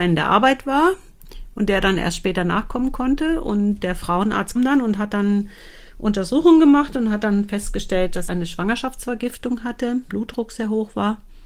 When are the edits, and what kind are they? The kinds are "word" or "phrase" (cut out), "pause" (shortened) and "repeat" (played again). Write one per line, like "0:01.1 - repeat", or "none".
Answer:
0:04.6 - word
0:08.3 - word
0:10.1 - word